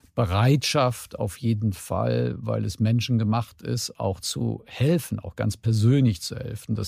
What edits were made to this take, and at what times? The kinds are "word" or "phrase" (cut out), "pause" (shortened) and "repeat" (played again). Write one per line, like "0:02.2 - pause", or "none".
none